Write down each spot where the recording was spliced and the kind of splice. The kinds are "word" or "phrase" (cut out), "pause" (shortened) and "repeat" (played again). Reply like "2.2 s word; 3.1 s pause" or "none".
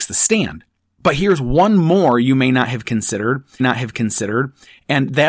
3.6 s repeat